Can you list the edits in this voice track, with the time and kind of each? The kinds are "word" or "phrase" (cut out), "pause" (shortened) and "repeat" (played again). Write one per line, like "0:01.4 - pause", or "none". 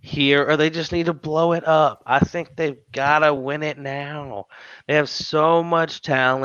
none